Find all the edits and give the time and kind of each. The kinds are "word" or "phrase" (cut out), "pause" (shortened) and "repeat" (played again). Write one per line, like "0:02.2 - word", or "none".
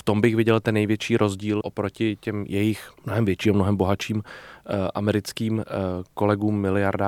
0:01.6 - word
0:03.0 - pause